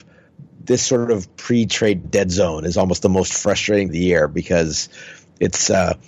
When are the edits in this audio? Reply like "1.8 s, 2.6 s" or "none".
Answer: 2.0 s, 3.9 s